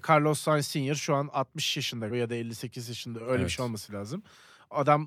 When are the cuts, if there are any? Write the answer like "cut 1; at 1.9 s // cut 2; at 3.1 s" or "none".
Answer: cut 1; at 2.1 s